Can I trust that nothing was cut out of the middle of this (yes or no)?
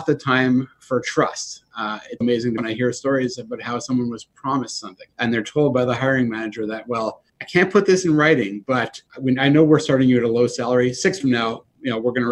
no